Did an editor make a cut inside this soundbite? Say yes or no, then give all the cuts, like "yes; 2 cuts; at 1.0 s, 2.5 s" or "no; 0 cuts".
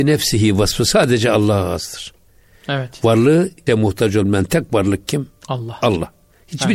yes; 2 cuts; at 2.3 s, 3.7 s